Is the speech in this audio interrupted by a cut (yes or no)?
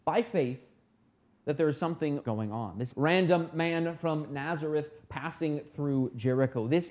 yes